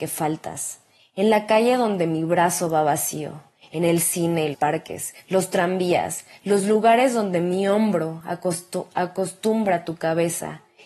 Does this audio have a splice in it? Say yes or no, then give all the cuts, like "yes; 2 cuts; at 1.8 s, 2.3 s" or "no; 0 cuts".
yes; 1 cut; at 4.5 s